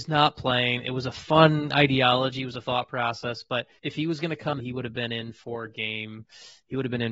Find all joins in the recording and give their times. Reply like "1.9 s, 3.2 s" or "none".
2.6 s, 3.8 s, 4.6 s